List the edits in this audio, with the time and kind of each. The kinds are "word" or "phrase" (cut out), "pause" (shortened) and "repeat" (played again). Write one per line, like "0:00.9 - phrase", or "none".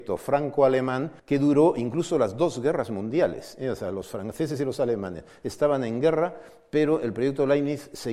0:01.2 - pause